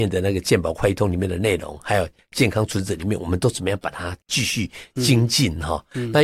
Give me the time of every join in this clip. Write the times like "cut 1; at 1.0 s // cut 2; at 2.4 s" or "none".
cut 1; at 4.2 s